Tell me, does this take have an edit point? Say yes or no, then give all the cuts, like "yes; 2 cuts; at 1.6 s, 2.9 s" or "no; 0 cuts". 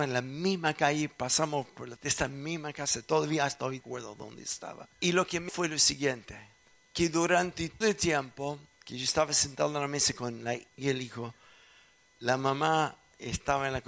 yes; 7 cuts; at 2.0 s, 3.8 s, 4.9 s, 5.5 s, 6.6 s, 7.8 s, 10.7 s